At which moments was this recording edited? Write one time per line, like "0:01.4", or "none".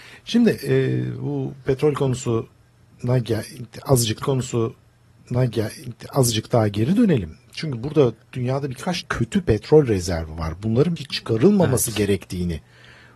0:04.2
0:09.0
0:11.0